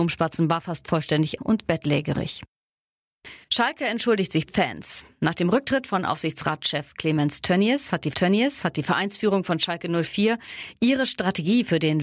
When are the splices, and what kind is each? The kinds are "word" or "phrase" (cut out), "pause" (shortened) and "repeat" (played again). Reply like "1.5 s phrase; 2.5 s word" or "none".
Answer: 1.4 s word; 3.4 s pause; 4.5 s phrase; 8.1 s repeat